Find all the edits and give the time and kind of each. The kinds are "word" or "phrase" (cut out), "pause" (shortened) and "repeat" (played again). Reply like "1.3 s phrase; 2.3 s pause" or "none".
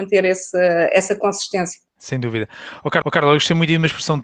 1.9 s pause; 3.0 s repeat

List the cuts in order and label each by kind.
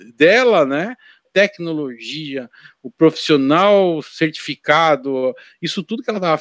1.2 s phrase

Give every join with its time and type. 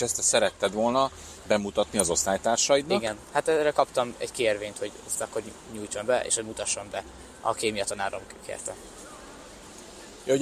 none

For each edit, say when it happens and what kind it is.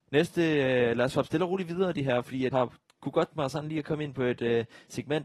2.5 s word; 3.3 s word

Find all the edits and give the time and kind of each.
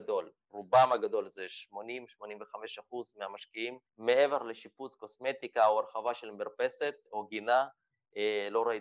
3.9 s pause

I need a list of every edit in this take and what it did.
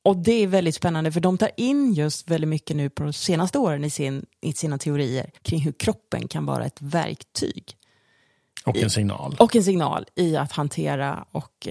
5.4 s pause

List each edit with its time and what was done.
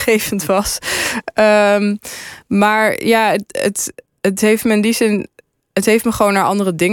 none

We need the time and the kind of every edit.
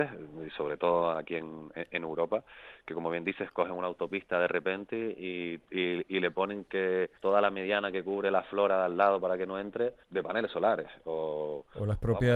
7.2 s pause; 10.0 s pause

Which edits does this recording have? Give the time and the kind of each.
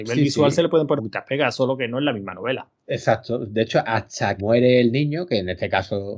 1.0 s word; 4.4 s word

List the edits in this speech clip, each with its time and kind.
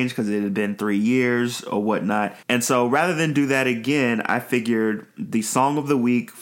2.4 s pause

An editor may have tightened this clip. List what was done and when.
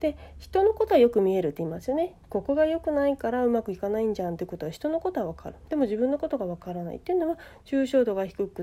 2.2 s pause

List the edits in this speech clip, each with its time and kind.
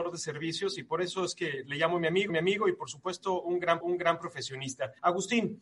2.3 s repeat; 3.8 s repeat

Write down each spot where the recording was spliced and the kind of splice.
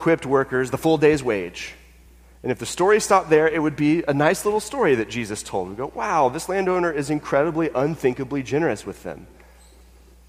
none

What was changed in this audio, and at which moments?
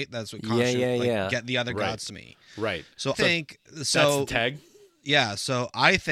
2.1 s word; 3.1 s word

